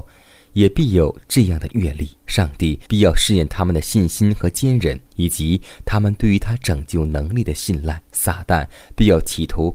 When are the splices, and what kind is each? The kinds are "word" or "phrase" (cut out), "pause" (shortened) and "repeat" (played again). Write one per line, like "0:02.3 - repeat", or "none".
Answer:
0:02.2 - pause
0:02.9 - pause
0:05.1 - pause
0:08.0 - pause